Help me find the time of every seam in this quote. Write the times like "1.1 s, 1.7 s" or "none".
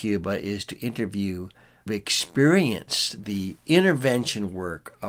1.9 s